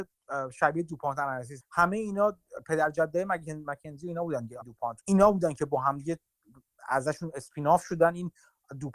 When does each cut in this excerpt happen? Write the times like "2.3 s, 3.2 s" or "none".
1.6 s, 4.6 s, 5.0 s